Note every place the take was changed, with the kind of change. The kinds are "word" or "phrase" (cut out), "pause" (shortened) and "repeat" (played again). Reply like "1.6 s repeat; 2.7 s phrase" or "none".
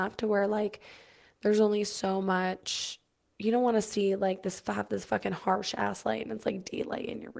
none